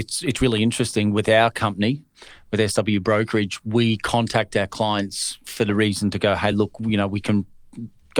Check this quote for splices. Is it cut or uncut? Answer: uncut